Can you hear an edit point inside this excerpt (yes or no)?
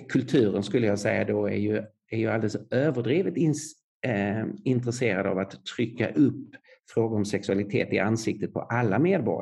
no